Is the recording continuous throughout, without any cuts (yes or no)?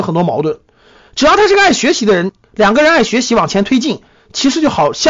yes